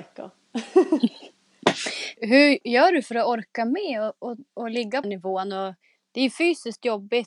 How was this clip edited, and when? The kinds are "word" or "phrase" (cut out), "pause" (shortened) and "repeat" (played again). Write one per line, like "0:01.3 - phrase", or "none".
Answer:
0:02.2 - word
0:05.0 - phrase